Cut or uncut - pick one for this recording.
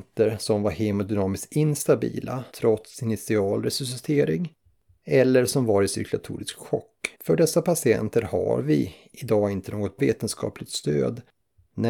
cut